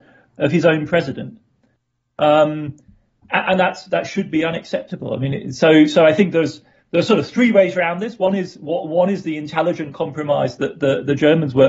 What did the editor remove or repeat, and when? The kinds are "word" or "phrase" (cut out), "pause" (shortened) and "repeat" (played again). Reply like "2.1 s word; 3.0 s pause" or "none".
none